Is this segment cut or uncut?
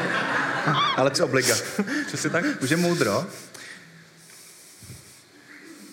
cut